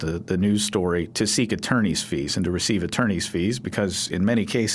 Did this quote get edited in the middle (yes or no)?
no